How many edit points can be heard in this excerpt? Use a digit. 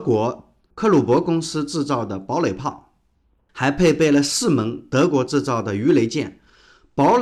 0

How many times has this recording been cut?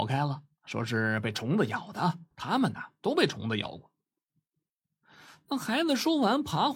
1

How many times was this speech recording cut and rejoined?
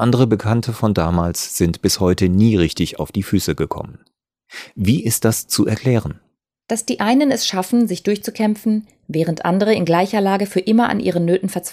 1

